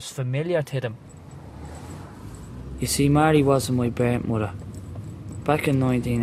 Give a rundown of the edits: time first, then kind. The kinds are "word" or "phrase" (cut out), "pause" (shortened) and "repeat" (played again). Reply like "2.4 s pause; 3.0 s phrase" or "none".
none